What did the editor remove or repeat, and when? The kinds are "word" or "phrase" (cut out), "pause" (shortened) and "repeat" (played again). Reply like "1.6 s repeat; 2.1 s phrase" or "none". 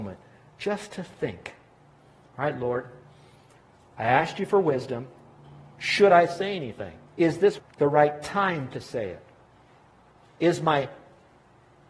5.7 s pause; 7.1 s pause